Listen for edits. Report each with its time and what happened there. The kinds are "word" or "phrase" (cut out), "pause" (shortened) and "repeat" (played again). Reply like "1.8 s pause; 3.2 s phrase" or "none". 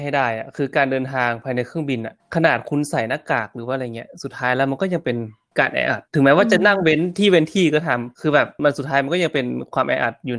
6.1 s pause